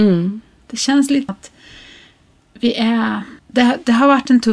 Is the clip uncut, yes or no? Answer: no